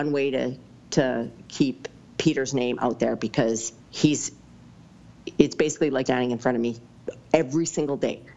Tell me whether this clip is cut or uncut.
cut